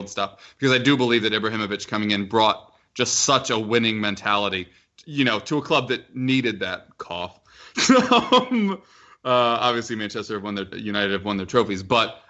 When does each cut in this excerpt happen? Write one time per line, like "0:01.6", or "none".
0:10.7

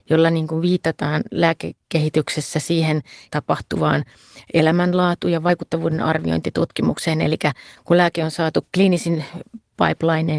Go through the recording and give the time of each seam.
0:03.3

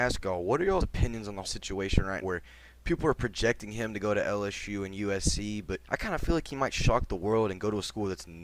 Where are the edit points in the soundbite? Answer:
0:01.4
0:02.2
0:05.8

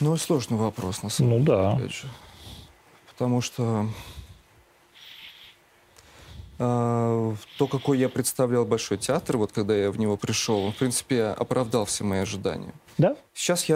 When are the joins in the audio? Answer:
none

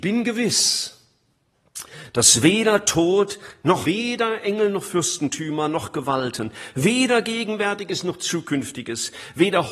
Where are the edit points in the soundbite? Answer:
0:03.8

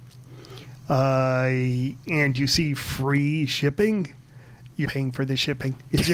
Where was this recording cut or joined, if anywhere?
0:04.9

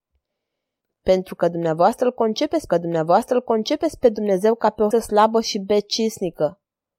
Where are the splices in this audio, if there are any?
0:02.7
0:04.9

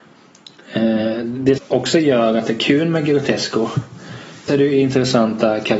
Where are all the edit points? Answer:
0:01.6
0:04.5

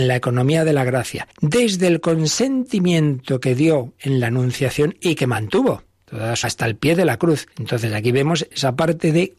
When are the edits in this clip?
0:01.3
0:06.4
0:07.5

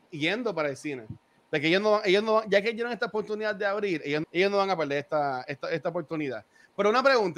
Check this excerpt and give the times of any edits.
0:04.2

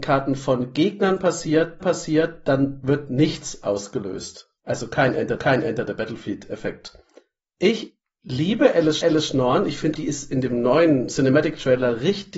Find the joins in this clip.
0:01.8
0:04.6
0:05.4
0:07.4
0:09.0
0:09.9

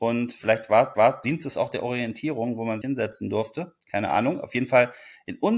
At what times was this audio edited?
0:00.9
0:02.8

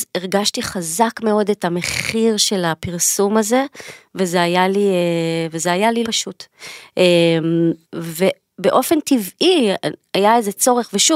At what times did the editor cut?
0:06.0
0:07.8

